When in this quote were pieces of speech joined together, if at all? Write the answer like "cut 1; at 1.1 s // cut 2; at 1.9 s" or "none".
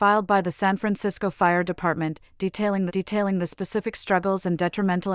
cut 1; at 2.9 s